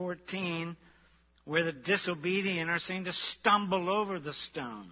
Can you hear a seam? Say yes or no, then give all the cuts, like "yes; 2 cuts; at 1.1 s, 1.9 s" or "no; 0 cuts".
no; 0 cuts